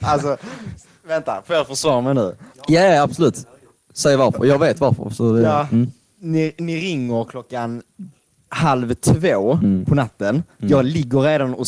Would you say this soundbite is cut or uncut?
uncut